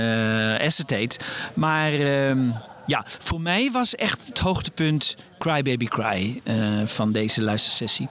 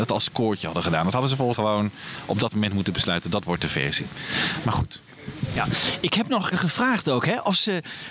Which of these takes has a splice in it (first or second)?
second